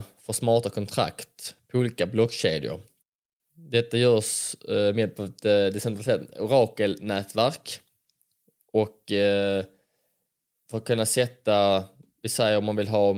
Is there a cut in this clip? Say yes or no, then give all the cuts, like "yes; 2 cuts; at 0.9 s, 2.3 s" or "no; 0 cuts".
no; 0 cuts